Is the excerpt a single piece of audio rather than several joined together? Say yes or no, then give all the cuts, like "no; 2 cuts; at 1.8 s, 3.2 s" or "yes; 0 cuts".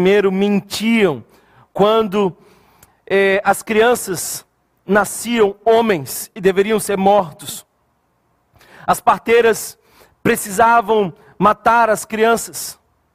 yes; 0 cuts